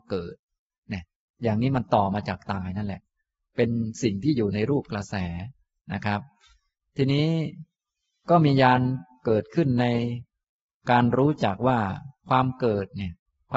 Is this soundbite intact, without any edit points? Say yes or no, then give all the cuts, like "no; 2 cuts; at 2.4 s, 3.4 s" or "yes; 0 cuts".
yes; 0 cuts